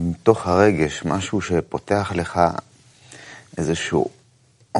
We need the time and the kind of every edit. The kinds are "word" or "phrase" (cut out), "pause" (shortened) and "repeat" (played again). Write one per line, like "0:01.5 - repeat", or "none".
none